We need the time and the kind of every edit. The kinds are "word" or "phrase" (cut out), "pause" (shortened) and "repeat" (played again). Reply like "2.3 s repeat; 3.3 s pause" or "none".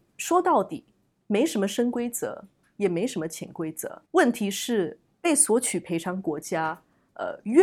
4.1 s pause